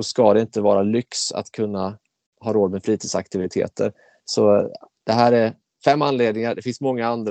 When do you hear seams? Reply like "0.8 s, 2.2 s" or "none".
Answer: none